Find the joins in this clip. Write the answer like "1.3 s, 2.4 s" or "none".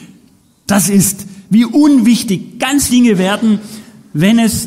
2.9 s